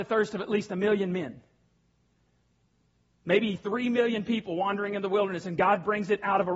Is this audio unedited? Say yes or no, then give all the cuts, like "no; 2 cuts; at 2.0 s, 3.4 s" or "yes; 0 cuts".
yes; 0 cuts